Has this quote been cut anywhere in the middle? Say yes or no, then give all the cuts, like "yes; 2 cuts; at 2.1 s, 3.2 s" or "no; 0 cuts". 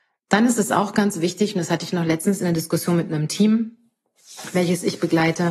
no; 0 cuts